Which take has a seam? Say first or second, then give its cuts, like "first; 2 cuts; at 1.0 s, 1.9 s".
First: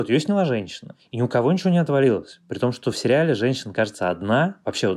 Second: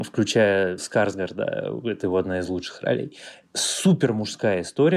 second; 1 cut; at 2.0 s